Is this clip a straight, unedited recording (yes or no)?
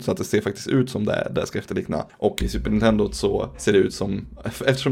no